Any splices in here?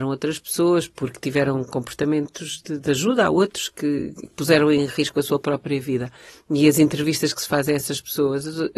no; 0 cuts

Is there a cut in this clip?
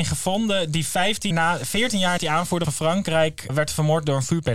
yes; 4 cuts; at 1.3 s, 2.2 s, 2.6 s, 3.5 s

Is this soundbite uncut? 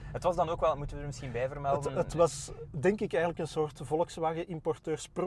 yes; 0 cuts

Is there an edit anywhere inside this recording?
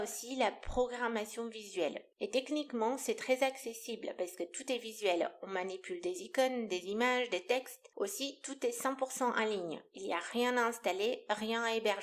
no; 0 cuts

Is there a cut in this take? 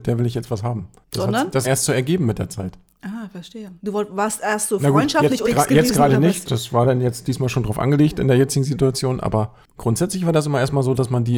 yes; 4 cuts; at 1.6 s, 3.8 s, 5.4 s, 6.4 s

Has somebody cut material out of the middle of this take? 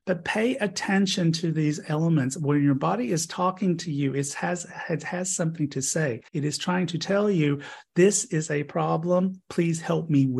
yes; 1 cut; at 6.3 s

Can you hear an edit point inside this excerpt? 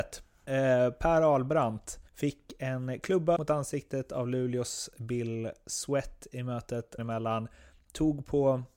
yes; 3 cuts; at 2.1 s, 3.4 s, 7.0 s

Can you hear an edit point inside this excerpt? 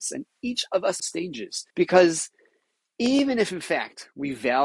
yes; 2 cuts; at 1.0 s, 1.7 s

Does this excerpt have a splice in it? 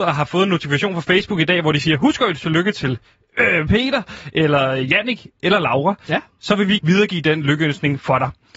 yes; 1 cut; at 6.8 s

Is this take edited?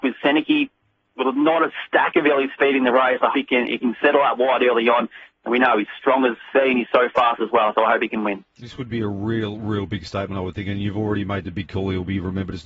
yes; 2 cuts; at 3.3 s, 6.5 s

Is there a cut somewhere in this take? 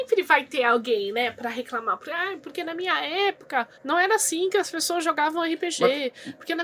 yes; 1 cut; at 3.7 s

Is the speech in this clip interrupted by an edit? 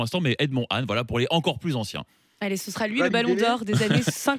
no; 0 cuts

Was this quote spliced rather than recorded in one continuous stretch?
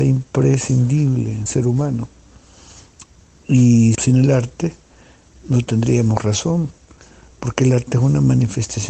yes; 3 cuts; at 1.5 s, 3.9 s, 5.4 s

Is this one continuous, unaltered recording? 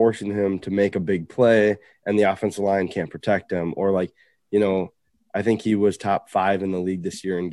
yes; 0 cuts

